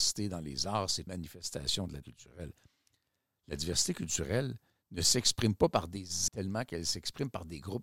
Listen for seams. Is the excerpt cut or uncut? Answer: cut